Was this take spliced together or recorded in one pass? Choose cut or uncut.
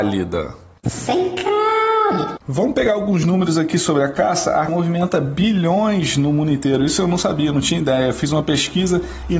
cut